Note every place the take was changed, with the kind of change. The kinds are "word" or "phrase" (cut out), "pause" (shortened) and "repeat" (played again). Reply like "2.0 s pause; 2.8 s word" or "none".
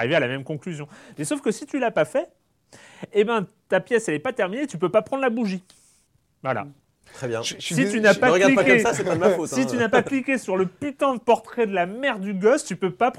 6.1 s pause